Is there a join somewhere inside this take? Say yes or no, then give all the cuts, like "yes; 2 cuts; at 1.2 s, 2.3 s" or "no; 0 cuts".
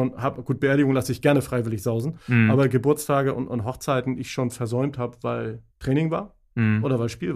yes; 1 cut; at 5.7 s